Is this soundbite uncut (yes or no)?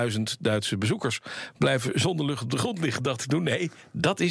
yes